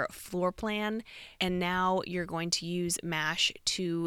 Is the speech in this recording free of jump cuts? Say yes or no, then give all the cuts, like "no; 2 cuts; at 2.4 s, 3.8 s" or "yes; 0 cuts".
no; 1 cut; at 1.4 s